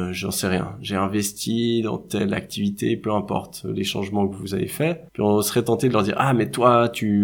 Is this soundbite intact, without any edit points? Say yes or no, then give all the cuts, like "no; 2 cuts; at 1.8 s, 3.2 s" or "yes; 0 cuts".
no; 1 cut; at 5.1 s